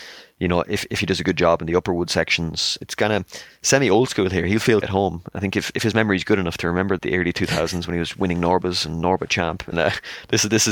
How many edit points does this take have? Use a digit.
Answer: 3